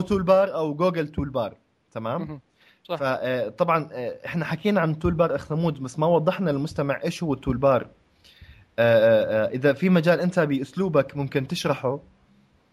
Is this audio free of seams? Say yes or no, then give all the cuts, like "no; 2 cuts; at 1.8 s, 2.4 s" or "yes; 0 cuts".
yes; 0 cuts